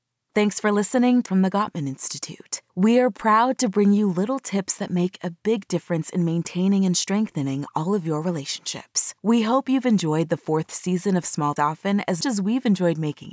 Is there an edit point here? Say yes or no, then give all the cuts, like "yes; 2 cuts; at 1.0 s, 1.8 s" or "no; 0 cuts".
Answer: yes; 5 cuts; at 1.3 s, 2.7 s, 9.2 s, 11.6 s, 12.2 s